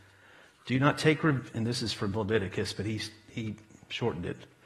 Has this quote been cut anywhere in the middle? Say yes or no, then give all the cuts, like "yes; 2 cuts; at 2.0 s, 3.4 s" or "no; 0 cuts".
no; 0 cuts